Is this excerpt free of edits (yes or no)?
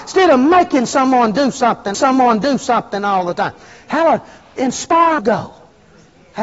no